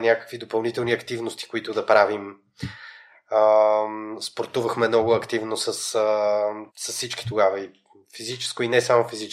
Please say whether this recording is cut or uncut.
cut